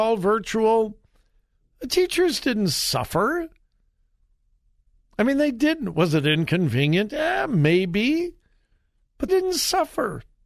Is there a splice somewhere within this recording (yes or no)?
yes